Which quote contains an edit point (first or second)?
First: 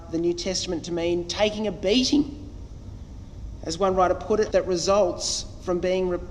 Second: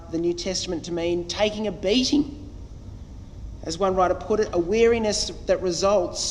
first